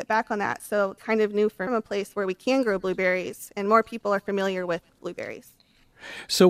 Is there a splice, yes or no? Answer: yes